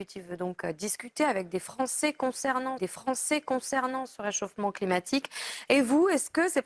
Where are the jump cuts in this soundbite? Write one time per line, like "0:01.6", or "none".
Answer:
0:02.8

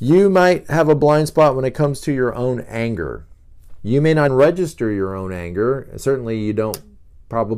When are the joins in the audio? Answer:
0:04.3

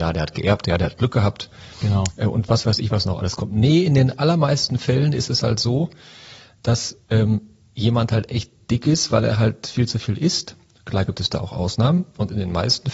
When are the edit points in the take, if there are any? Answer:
none

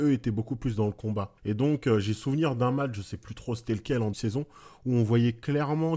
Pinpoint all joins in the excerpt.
0:01.4
0:04.1

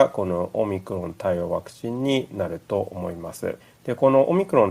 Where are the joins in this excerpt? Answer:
0:03.6

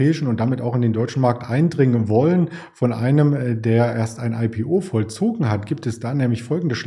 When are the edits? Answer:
none

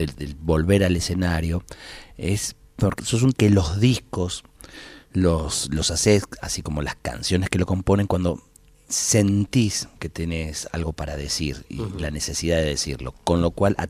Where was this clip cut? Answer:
0:03.0
0:03.3

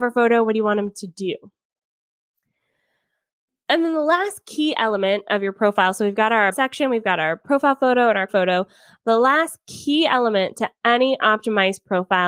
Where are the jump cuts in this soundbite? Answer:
0:06.5
0:08.3

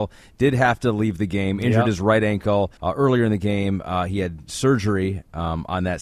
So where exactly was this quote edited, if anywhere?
0:02.8

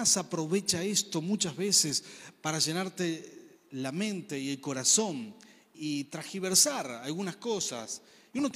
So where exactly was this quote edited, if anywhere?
0:05.7

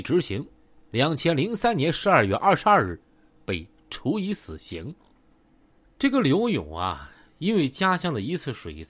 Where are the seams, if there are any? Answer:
none

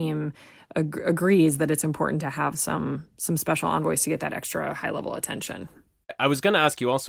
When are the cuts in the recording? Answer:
none

